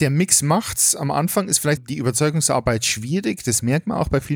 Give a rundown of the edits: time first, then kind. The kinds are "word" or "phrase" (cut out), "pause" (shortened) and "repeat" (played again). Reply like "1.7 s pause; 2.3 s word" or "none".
1.8 s word